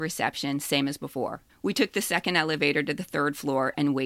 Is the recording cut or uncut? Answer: cut